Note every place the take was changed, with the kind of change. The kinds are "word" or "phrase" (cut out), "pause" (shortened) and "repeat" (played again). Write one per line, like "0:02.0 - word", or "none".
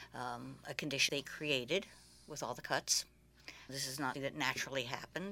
0:01.1 - word
0:03.7 - word
0:04.1 - word